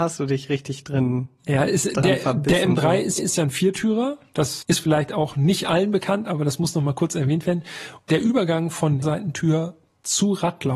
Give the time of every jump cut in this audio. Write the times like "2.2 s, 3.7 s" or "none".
3.2 s, 4.6 s, 9.0 s